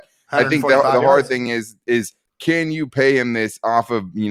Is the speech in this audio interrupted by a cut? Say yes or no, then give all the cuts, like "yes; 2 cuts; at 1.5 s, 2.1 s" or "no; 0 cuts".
no; 0 cuts